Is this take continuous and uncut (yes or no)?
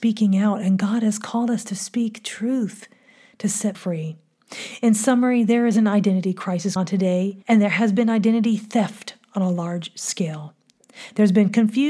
no